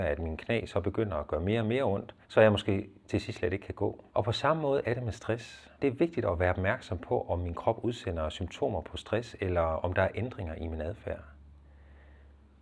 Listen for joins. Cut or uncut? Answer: cut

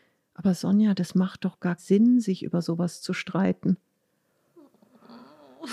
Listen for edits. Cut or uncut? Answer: cut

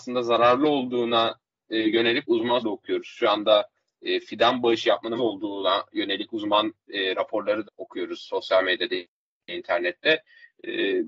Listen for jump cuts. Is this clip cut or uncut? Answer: cut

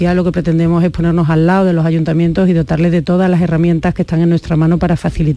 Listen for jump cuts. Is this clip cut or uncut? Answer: uncut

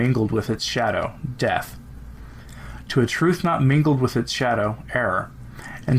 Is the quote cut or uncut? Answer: uncut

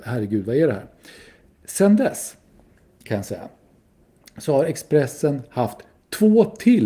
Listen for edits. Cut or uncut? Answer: uncut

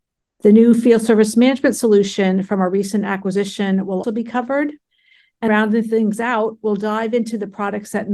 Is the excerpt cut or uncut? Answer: cut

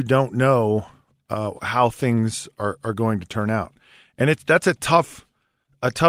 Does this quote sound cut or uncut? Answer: uncut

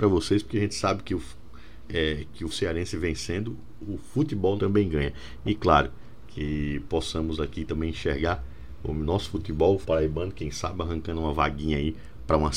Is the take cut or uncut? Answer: cut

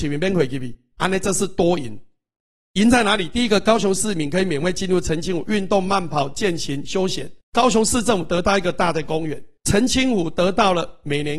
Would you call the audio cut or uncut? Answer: cut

